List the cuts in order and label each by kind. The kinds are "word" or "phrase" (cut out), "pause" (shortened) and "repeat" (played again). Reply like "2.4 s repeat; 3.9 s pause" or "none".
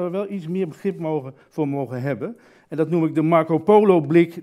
none